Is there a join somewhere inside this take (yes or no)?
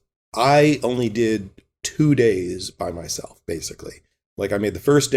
no